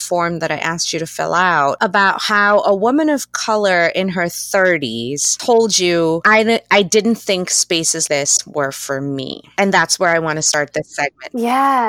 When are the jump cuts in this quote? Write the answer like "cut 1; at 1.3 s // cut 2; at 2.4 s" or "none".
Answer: cut 1; at 8.1 s